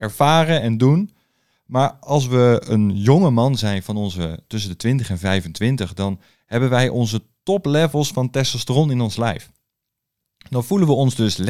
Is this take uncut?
yes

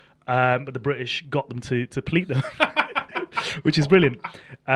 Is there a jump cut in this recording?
no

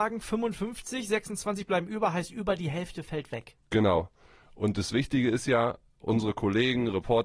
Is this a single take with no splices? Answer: yes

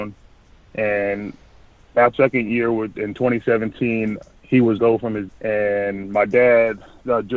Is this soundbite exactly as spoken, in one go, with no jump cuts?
no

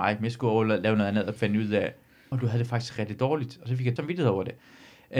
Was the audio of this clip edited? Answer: yes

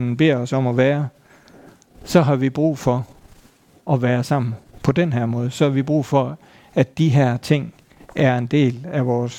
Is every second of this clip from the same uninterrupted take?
yes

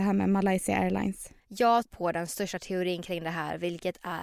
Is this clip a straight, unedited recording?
no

